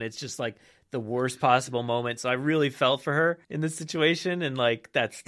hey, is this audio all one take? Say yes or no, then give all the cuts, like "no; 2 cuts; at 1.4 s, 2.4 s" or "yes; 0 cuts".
no; 1 cut; at 3.4 s